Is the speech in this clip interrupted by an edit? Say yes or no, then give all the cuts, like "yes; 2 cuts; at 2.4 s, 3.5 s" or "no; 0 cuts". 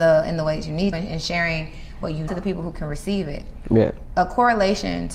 yes; 2 cuts; at 0.9 s, 2.3 s